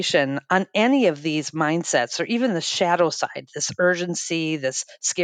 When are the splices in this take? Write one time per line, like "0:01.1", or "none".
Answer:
none

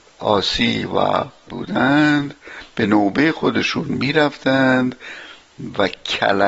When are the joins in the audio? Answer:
0:01.5

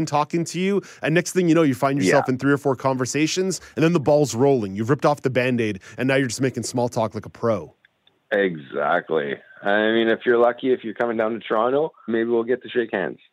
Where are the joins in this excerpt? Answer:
0:12.1

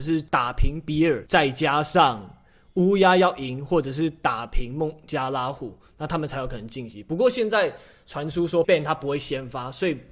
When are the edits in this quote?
0:08.6

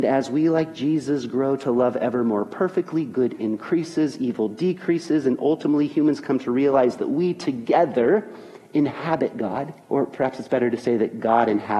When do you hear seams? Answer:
0:09.8

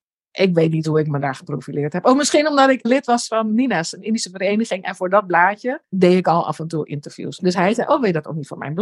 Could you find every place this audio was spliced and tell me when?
none

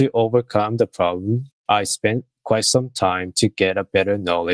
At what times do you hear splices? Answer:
none

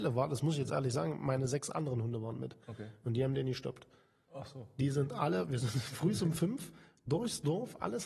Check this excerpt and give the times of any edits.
0:02.6

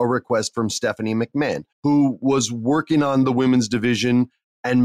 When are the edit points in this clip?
0:01.7

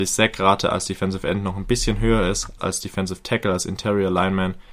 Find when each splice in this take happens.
0:02.6

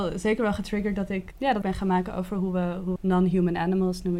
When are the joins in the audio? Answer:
0:01.3
0:01.6
0:03.0

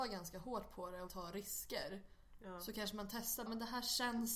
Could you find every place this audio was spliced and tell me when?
0:01.1
0:03.5

